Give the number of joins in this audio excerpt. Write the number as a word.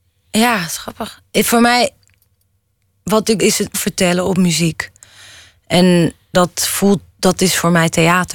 three